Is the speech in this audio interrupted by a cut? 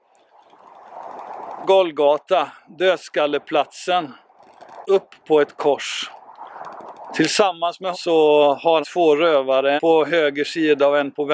yes; 5 cuts; at 1.6 s, 4.8 s, 7.9 s, 8.8 s, 9.8 s

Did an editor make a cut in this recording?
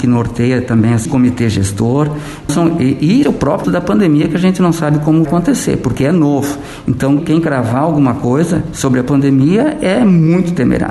yes; 6 cuts; at 1.0 s, 2.5 s, 3.2 s, 3.6 s, 5.2 s, 7.2 s

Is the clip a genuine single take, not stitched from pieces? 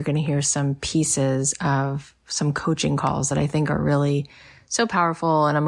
yes; 0 cuts

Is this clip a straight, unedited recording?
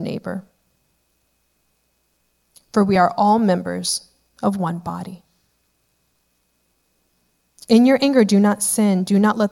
yes; 0 cuts

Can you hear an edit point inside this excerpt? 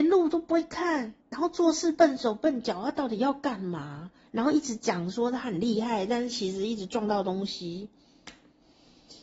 yes; 1 cut; at 1.2 s

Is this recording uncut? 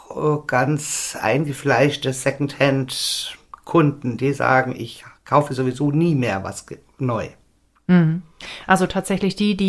yes; 0 cuts

